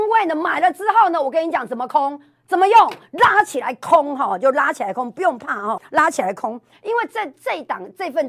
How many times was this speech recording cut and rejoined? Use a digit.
1